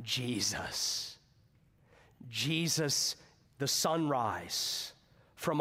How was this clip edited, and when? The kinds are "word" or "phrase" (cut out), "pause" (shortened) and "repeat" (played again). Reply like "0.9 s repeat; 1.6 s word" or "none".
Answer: 3.4 s word